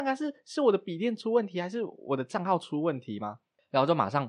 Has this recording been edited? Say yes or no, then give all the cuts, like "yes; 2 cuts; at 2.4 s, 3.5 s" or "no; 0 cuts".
no; 0 cuts